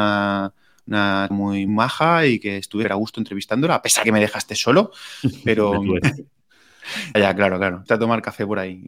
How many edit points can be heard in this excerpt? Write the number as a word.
seven